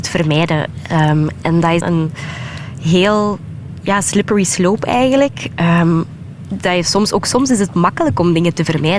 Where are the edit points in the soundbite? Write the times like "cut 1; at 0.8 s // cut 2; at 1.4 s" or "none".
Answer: cut 1; at 1.8 s